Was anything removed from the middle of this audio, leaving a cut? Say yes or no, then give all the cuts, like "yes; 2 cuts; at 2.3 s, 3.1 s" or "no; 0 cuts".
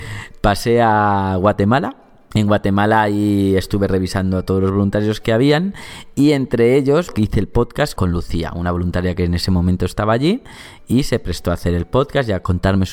no; 0 cuts